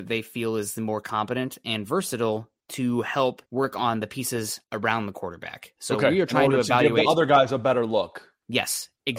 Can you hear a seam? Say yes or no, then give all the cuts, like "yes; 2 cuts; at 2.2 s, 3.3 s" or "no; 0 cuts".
yes; 2 cuts; at 3.5 s, 4.6 s